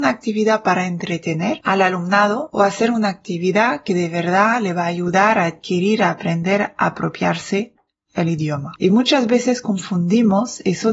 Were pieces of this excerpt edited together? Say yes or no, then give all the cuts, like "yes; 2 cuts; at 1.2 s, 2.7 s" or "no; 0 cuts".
no; 0 cuts